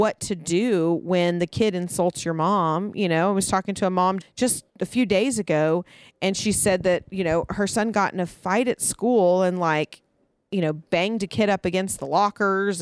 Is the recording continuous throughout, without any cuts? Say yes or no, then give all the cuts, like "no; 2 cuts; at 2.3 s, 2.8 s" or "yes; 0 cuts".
no; 2 cuts; at 4.2 s, 4.7 s